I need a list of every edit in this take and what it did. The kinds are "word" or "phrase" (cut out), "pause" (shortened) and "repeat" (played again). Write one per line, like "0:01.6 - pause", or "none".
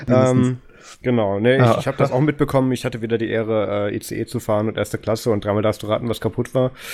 none